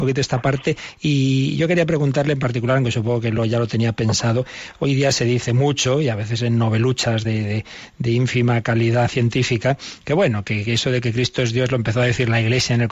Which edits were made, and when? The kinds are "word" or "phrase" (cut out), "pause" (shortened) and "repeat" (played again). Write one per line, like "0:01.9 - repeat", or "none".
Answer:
none

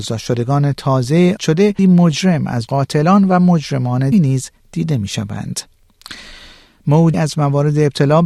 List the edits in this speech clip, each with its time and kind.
0:01.4 - word
0:01.8 - word
0:02.7 - word
0:04.1 - word
0:07.1 - word

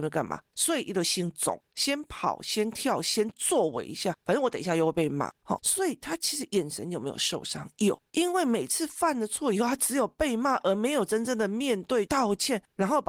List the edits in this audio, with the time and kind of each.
0:05.6 - word
0:12.1 - phrase

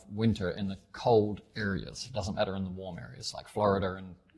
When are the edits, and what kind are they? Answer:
none

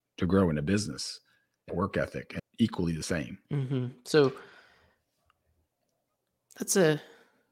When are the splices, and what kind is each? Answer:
0:01.7 - word
0:02.4 - phrase
0:03.4 - pause

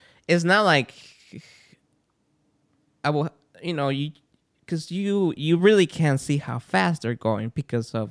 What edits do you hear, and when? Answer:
none

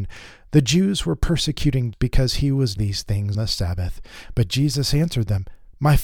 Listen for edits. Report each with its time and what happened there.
0:01.9 - word
0:02.8 - word
0:03.3 - word

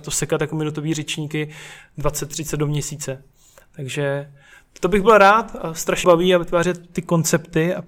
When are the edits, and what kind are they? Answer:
0:06.0 - phrase

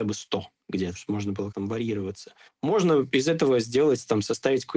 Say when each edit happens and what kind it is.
0:01.0 - word
0:01.5 - word
0:02.5 - pause

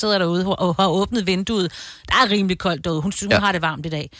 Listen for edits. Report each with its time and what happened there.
none

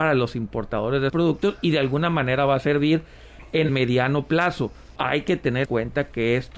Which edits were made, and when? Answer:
0:01.1 - word
0:03.7 - word
0:05.0 - word
0:05.7 - word

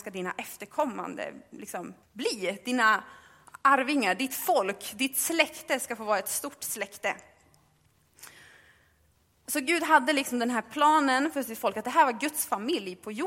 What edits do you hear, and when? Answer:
0:02.0 - pause
0:03.6 - pause

